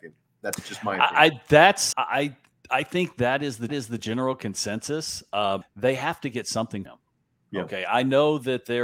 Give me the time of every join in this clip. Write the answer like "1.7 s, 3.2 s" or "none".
1.9 s, 3.7 s, 5.6 s, 6.8 s